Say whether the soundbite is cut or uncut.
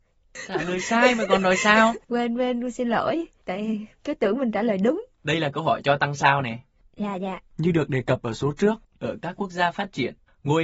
uncut